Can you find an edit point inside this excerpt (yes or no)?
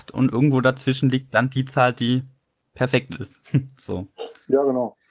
no